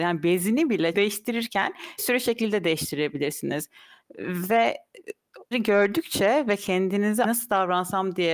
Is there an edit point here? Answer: yes; 4 cuts; at 0.9 s, 2.0 s, 5.5 s, 7.2 s

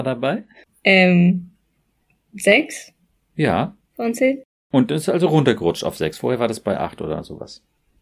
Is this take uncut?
yes; 0 cuts

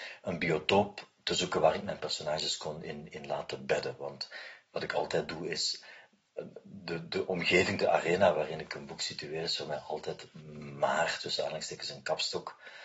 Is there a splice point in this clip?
no; 0 cuts

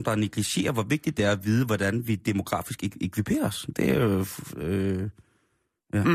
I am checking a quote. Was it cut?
no; 0 cuts

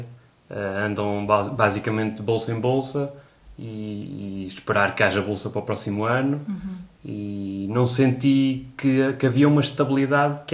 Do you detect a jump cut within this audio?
no; 0 cuts

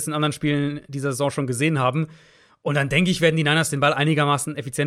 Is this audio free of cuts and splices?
yes; 0 cuts

